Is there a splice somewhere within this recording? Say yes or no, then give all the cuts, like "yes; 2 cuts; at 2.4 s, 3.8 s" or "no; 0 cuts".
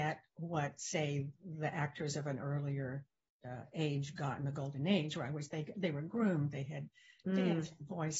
no; 0 cuts